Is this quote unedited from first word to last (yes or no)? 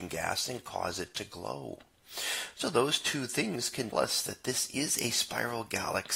no